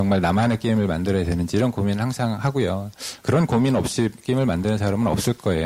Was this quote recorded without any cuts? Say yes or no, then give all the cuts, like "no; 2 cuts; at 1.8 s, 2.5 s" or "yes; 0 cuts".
yes; 0 cuts